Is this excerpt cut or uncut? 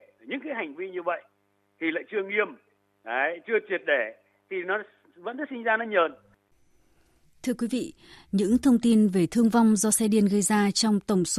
uncut